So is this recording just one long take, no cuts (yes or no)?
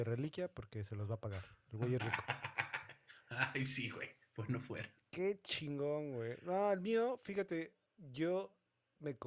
no